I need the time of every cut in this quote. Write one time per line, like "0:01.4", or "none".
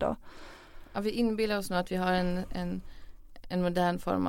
none

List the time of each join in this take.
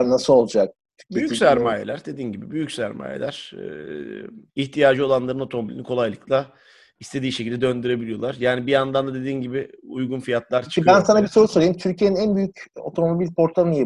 0:04.5

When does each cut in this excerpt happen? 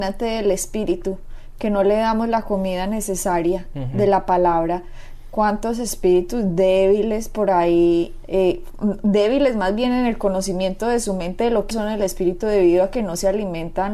0:08.2
0:11.7

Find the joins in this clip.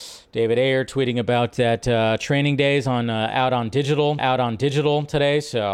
0:04.2

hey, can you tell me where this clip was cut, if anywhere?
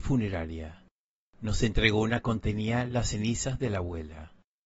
0:02.2

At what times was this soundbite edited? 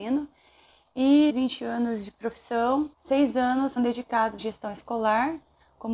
0:01.3
0:02.9
0:03.8
0:04.4

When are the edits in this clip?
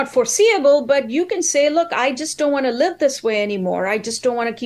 none

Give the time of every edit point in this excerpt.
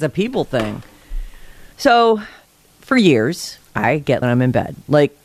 0:01.7
0:03.6
0:04.2

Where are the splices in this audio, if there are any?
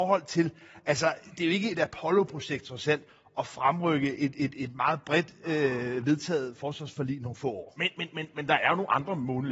none

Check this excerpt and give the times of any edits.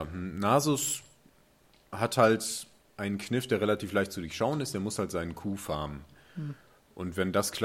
none

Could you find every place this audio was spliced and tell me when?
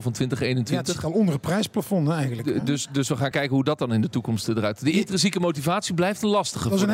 none

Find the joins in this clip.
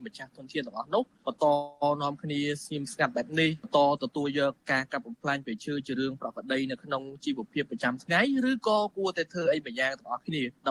0:04.6

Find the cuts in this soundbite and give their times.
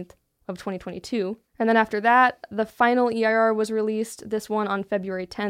0:01.5

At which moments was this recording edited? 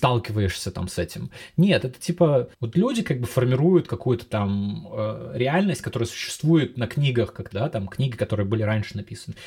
0:02.5
0:07.5

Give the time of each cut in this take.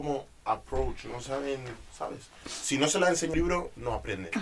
0:02.4
0:03.3

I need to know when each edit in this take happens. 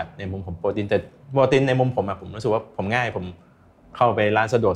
none

